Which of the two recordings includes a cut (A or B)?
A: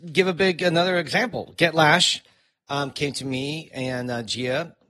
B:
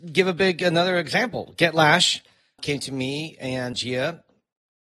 B